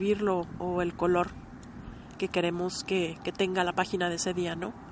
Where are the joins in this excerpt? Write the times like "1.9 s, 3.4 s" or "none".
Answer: none